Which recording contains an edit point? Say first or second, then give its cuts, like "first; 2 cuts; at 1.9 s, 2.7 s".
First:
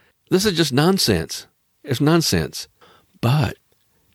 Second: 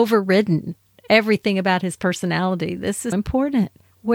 second; 1 cut; at 3.1 s